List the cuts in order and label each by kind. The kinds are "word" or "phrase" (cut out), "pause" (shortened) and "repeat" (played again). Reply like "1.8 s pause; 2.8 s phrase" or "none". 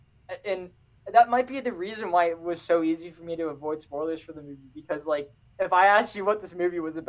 5.4 s pause

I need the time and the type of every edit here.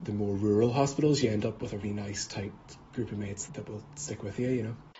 1.8 s word; 3.5 s word

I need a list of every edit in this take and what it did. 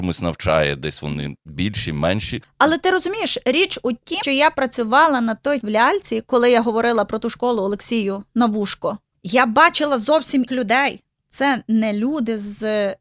4.2 s word; 5.6 s word; 10.5 s word

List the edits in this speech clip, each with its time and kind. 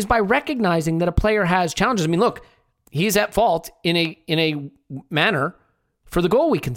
none

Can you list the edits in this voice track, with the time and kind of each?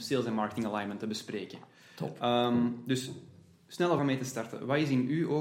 4.0 s word

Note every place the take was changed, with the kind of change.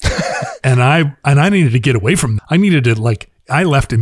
2.4 s word

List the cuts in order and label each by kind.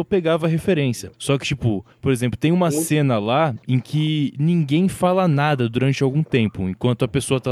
1.1 s pause

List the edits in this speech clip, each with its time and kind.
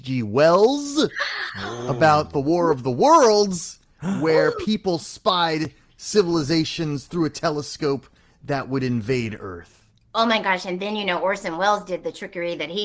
none

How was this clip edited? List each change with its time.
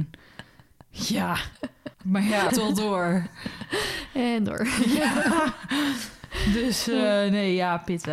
1.9 s pause; 2.5 s word

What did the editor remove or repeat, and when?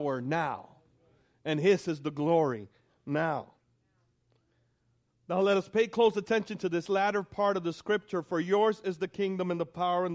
none

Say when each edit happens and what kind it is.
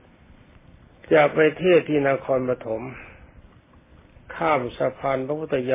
none

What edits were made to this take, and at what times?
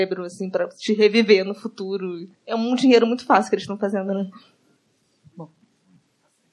2.3 s pause; 4.8 s pause

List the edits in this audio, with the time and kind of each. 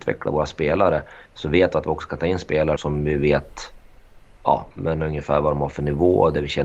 1.3 s pause; 2.8 s word

